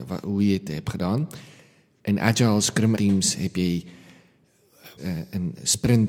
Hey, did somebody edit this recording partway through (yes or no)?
yes